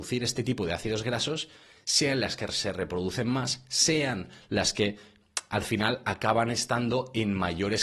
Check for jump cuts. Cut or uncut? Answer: uncut